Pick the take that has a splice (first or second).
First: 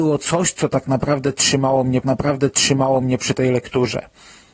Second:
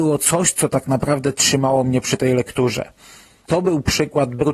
first